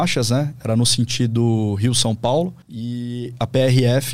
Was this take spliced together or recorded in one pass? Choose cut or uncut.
cut